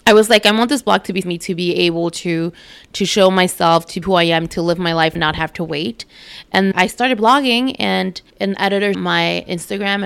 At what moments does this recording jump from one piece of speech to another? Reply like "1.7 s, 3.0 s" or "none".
1.2 s, 4.0 s, 5.2 s, 6.7 s, 8.3 s, 8.9 s